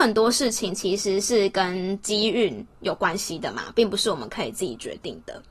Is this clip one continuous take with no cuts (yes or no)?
no